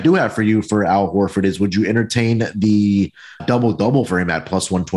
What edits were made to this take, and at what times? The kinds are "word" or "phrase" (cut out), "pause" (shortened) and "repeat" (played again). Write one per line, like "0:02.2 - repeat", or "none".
0:03.4 - word

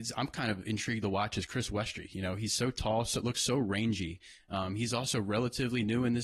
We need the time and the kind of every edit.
none

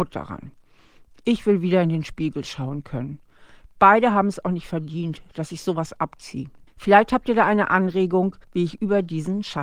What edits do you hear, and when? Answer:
0:06.7 - pause
0:08.4 - pause

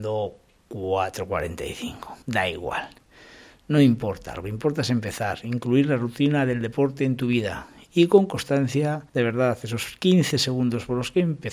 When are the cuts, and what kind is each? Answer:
0:02.2 - pause
0:09.1 - pause

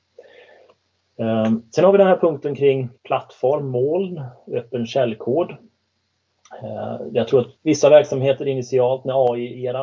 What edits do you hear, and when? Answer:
0:03.0 - pause
0:07.6 - pause

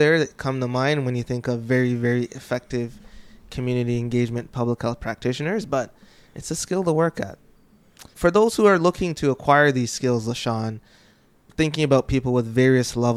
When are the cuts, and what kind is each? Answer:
none

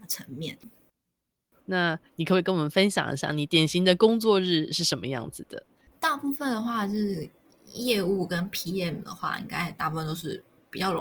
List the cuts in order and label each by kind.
none

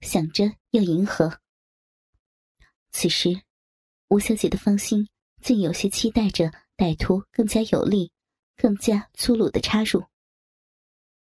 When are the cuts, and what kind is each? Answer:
none

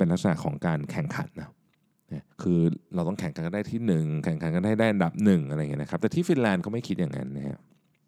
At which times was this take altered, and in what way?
0:02.3 - pause

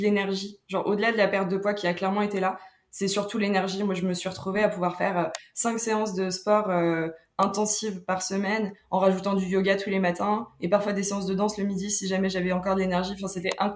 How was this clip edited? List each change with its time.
none

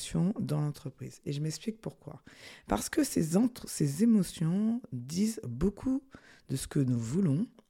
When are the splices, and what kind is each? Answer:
none

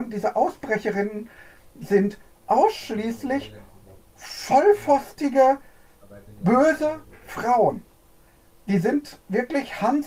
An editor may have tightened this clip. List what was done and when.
none

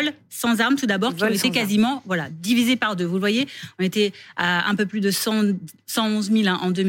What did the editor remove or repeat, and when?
none

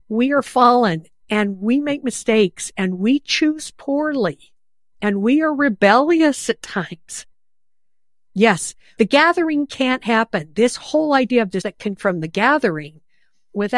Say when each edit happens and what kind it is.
0:09.0 - word
0:11.6 - word
0:12.0 - word

